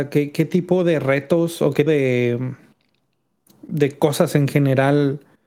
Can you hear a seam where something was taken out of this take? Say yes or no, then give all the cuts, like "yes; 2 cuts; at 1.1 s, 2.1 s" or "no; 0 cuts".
yes; 1 cut; at 1.9 s